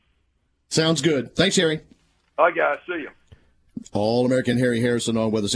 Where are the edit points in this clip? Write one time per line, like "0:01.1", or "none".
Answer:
none